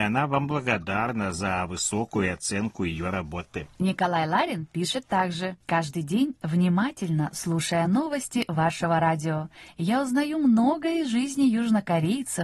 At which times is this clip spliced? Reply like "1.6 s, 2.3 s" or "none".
none

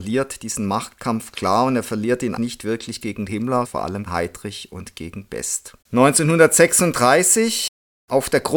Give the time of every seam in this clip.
2.4 s, 3.6 s, 4.1 s, 5.8 s

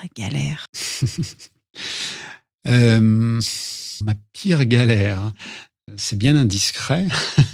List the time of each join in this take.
4.0 s, 5.9 s

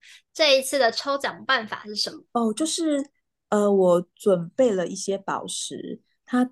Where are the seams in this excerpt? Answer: 2.2 s

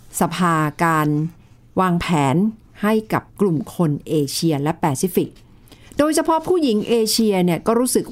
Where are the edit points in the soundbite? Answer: none

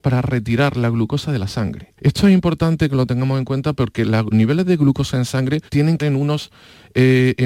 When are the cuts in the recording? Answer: 2.0 s, 4.3 s, 5.7 s, 6.0 s

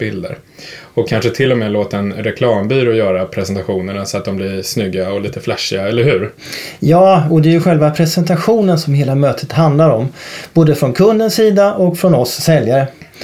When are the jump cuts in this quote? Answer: none

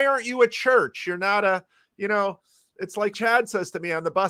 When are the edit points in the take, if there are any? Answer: 3.1 s

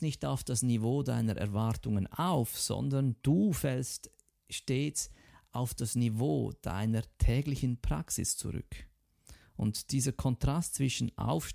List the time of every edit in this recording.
none

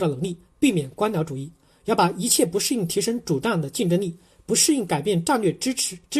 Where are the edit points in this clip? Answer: none

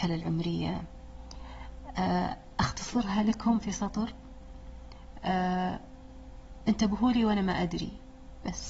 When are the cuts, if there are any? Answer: none

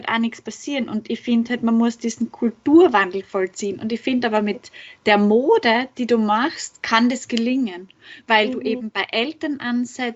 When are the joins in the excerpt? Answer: none

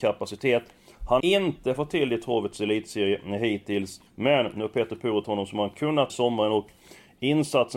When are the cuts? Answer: 1.2 s, 4.1 s, 5.2 s, 6.1 s

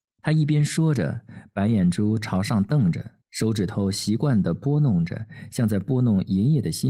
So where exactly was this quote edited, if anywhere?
3.2 s

